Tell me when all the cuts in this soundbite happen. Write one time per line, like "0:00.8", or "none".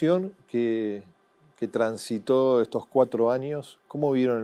none